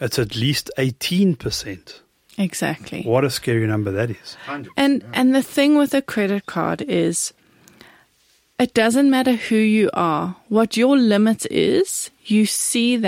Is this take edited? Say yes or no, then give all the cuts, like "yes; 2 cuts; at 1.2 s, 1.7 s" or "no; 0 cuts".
no; 0 cuts